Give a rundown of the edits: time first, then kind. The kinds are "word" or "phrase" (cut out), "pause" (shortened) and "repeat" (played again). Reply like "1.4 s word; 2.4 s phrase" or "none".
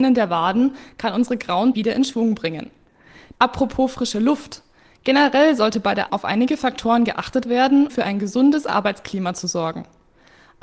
1.7 s word; 6.1 s word; 7.9 s word